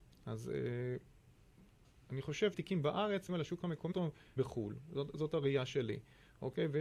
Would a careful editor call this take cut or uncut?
cut